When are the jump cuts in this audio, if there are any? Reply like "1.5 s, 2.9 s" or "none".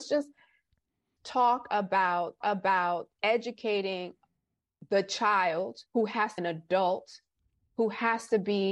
1.2 s, 2.4 s, 5.9 s, 6.4 s